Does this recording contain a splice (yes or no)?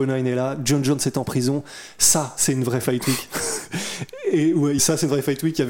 yes